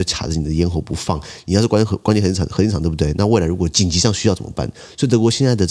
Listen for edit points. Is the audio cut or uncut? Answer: uncut